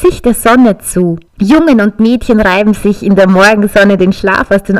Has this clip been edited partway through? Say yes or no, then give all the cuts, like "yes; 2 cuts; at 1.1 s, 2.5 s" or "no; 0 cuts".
yes; 1 cut; at 1.3 s